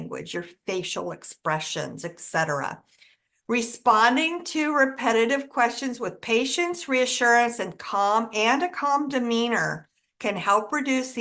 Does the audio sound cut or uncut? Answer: uncut